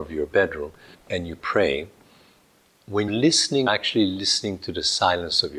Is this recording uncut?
no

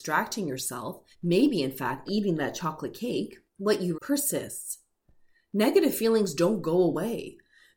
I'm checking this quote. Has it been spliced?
yes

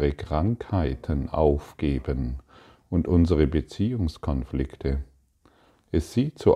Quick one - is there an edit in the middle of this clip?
no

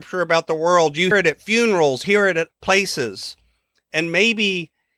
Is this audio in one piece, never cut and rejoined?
no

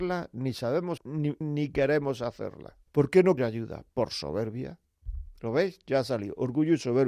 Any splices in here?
yes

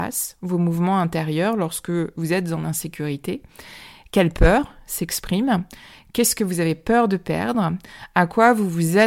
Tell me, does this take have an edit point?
no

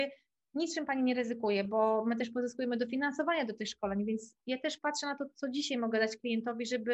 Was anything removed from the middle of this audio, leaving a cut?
no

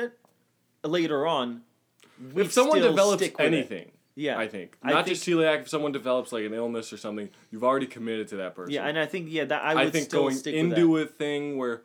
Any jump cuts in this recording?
no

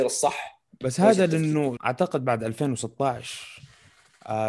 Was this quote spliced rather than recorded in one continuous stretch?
yes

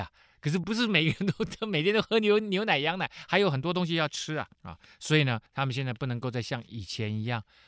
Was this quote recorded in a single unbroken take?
no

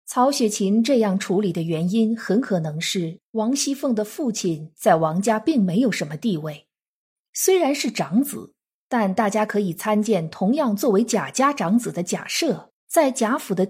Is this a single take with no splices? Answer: yes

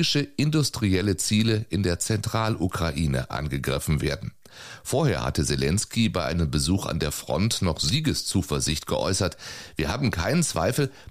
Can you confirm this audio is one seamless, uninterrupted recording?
yes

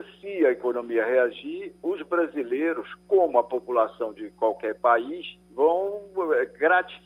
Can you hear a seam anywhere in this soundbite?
yes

